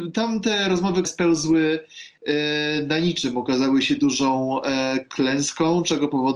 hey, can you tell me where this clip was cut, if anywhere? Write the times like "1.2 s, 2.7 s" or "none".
1.0 s